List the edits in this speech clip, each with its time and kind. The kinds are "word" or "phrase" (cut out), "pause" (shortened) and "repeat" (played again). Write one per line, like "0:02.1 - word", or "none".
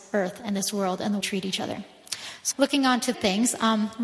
0:01.2 - phrase
0:02.5 - word
0:03.1 - phrase